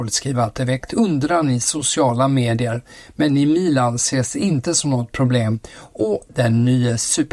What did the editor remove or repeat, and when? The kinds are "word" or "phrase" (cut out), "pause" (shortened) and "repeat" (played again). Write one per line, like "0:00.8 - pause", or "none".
none